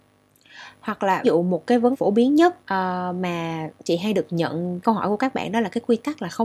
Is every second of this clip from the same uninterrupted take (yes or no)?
no